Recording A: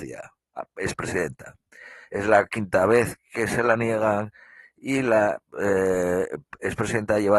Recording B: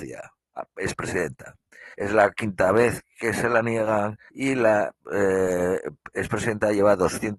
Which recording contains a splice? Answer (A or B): B